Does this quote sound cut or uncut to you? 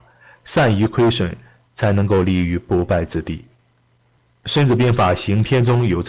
uncut